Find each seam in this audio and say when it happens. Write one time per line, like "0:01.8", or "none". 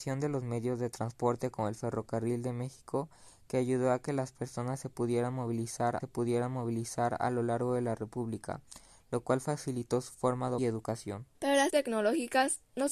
0:06.0
0:10.6
0:11.3
0:11.7